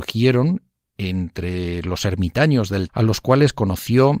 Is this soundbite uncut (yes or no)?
no